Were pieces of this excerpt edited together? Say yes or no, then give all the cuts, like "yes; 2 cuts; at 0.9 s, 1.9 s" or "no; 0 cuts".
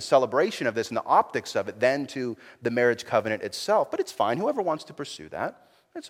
no; 0 cuts